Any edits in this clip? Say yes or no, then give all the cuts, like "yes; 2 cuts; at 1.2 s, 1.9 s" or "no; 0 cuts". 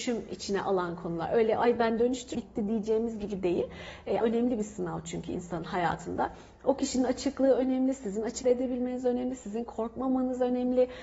yes; 3 cuts; at 2.3 s, 4.2 s, 8.4 s